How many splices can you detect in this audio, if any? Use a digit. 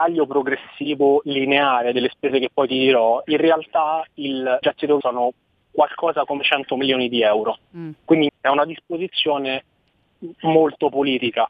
3